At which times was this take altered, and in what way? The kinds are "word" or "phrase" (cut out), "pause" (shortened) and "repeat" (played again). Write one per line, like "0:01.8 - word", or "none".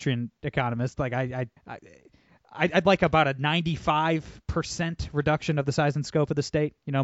0:01.6 - pause